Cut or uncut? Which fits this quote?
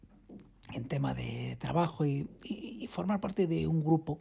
uncut